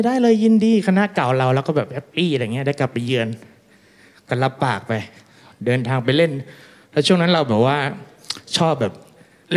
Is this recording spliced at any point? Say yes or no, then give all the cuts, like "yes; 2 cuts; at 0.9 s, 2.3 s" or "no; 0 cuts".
no; 0 cuts